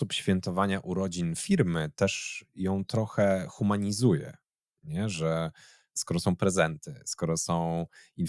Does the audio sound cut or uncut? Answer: uncut